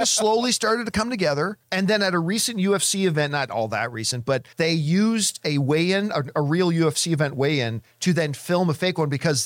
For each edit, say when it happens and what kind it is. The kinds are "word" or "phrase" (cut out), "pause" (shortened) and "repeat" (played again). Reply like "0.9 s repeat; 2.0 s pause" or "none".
1.6 s pause; 4.5 s pause